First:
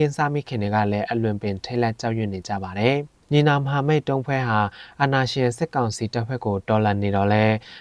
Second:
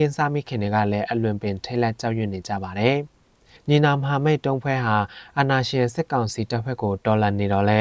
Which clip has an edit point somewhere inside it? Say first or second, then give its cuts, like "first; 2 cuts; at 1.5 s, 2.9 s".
first; 1 cut; at 3.2 s